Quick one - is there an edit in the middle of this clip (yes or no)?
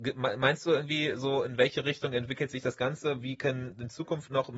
no